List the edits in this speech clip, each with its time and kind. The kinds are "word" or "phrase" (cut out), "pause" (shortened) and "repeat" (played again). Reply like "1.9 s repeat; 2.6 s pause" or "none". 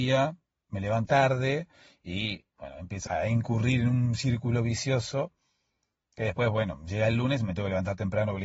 1.1 s phrase; 3.1 s word